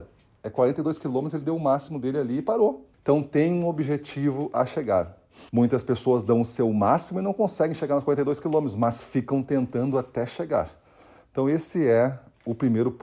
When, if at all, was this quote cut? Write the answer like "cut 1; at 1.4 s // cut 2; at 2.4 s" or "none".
cut 1; at 2.9 s // cut 2; at 5.5 s

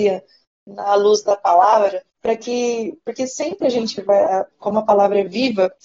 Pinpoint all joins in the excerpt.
cut 1; at 2.1 s

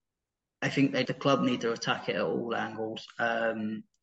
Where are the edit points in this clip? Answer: cut 1; at 1.1 s

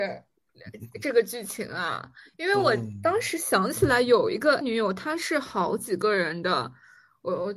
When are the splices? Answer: cut 1; at 4.6 s

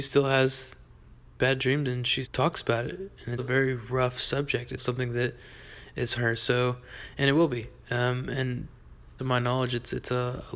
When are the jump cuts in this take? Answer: cut 1; at 2.2 s // cut 2; at 3.4 s // cut 3; at 4.8 s // cut 4; at 6.1 s // cut 5; at 9.2 s

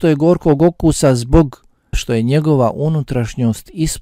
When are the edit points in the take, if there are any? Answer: cut 1; at 1.9 s

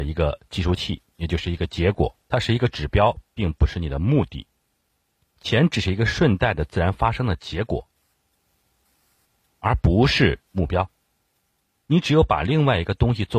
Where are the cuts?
cut 1; at 2.2 s // cut 2; at 10.4 s

